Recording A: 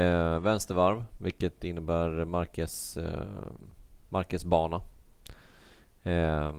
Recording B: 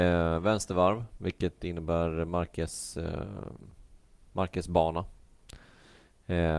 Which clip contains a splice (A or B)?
A